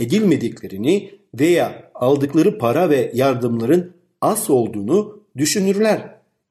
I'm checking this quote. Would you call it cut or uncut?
uncut